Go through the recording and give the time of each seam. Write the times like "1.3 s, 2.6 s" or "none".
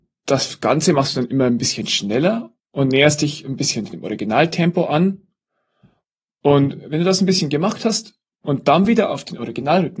none